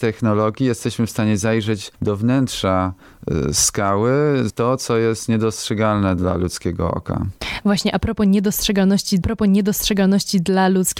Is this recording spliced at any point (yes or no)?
yes